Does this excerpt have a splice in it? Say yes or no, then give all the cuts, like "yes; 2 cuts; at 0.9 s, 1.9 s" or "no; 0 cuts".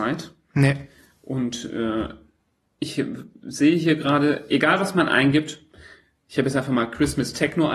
no; 0 cuts